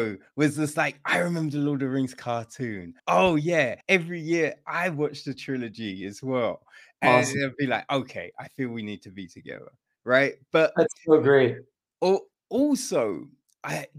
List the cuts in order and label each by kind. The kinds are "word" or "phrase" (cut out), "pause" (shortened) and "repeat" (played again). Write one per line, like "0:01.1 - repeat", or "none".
0:03.0 - pause
0:03.8 - pause